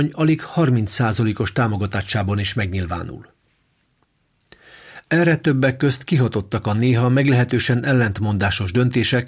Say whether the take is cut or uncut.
uncut